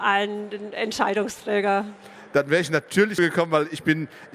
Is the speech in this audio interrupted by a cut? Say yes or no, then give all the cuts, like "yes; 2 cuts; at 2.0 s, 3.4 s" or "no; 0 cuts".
yes; 1 cut; at 3.2 s